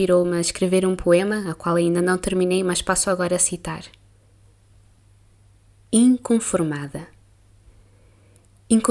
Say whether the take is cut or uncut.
uncut